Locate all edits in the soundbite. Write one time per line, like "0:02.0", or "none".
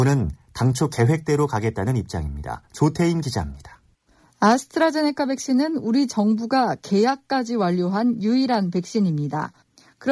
0:03.9